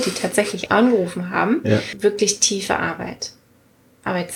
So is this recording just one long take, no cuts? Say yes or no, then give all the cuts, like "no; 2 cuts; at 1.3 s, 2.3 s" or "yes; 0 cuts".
yes; 0 cuts